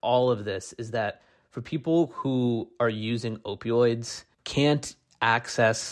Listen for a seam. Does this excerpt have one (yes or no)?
yes